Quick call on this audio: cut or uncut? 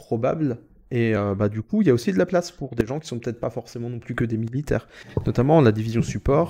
uncut